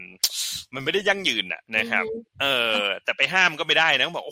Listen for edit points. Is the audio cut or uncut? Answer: cut